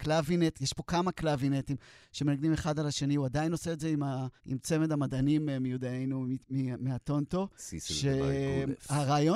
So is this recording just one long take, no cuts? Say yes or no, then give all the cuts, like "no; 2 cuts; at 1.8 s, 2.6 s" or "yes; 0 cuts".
no; 1 cut; at 4.4 s